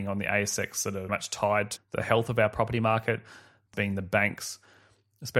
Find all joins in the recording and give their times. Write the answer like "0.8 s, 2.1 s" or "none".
1.1 s, 1.8 s, 3.7 s